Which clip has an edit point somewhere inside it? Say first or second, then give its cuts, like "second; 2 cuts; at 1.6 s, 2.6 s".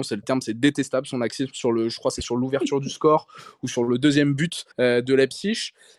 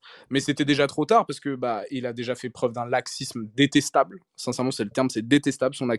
first; 1 cut; at 4.7 s